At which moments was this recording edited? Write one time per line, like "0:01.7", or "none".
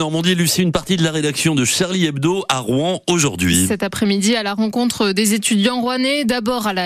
none

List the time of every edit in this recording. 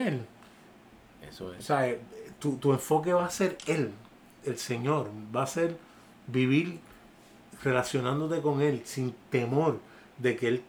none

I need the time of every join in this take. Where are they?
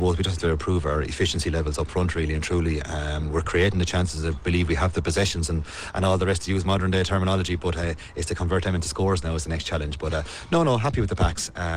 none

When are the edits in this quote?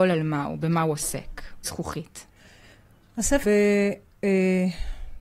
0:01.6
0:03.4

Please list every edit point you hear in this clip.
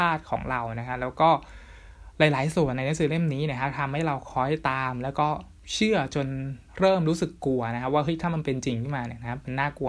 0:06.7

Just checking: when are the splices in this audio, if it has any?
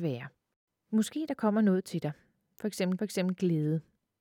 0:03.0

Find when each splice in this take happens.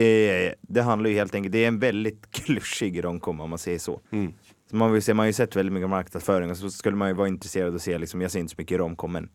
0:04.0

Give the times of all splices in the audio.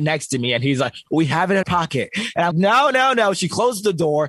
0:01.0
0:01.6
0:02.5

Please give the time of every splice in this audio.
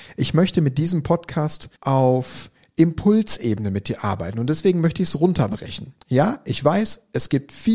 0:01.8
0:06.0

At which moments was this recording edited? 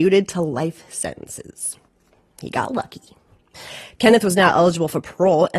none

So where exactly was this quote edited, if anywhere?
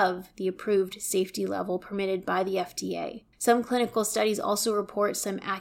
0:03.3

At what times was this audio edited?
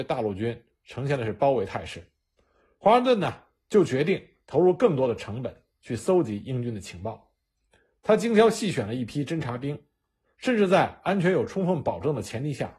none

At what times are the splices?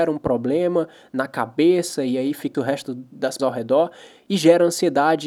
0:02.5
0:03.4

